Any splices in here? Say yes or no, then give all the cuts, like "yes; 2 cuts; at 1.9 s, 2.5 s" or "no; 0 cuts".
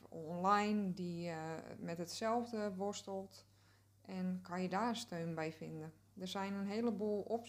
no; 0 cuts